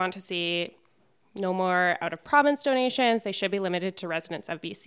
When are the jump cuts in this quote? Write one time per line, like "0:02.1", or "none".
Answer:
none